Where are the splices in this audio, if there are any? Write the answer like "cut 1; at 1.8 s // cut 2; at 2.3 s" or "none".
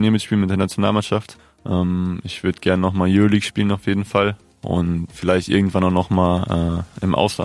cut 1; at 5.1 s